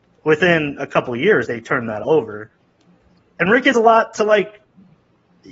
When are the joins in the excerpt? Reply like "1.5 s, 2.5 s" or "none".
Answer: 1.5 s, 2.0 s, 3.7 s